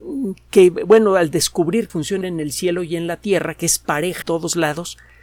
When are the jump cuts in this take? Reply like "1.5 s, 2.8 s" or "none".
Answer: 1.9 s, 2.2 s, 4.2 s

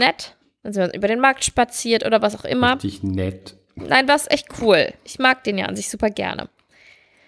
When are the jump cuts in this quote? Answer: none

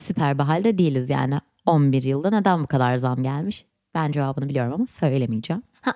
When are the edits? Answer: none

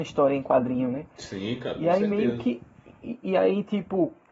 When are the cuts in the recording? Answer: none

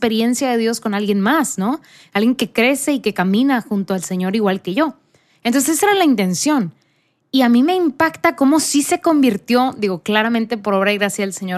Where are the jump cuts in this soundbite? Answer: none

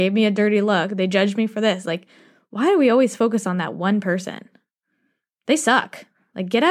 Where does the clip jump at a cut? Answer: none

